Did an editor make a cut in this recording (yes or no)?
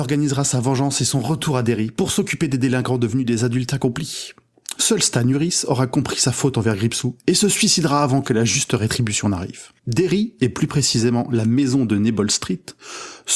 yes